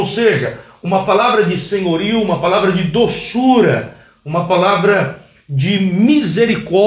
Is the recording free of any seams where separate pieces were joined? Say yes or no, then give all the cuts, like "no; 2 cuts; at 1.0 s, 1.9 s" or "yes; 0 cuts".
yes; 0 cuts